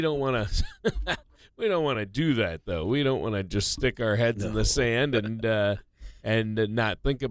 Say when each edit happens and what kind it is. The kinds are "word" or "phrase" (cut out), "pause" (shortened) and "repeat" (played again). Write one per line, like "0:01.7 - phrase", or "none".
none